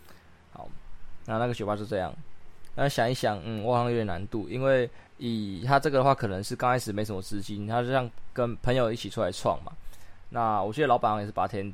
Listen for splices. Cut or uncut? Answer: cut